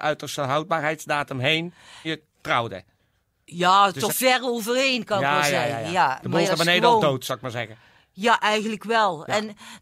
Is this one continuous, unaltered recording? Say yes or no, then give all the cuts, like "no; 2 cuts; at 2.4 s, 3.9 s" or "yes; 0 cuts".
no; 3 cuts; at 2.0 s, 4.1 s, 6.4 s